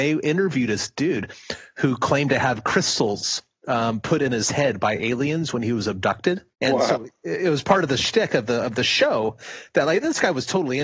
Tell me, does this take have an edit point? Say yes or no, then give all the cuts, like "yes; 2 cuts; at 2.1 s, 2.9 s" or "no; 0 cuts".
yes; 1 cut; at 6.5 s